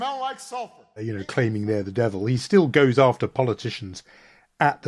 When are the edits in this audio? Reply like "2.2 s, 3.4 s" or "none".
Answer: none